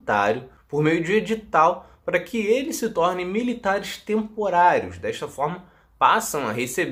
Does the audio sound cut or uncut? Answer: uncut